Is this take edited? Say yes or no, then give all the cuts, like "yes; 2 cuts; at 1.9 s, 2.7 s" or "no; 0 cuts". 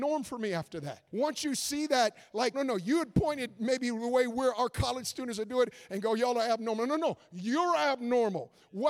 yes; 2 cuts; at 1.1 s, 2.5 s